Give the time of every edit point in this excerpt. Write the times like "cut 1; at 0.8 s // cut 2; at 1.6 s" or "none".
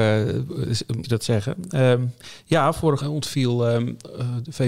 cut 1; at 1.0 s // cut 2; at 3.0 s